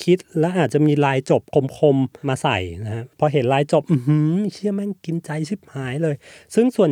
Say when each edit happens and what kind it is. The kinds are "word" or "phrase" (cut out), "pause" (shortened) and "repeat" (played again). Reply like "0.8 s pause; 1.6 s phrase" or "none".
3.1 s pause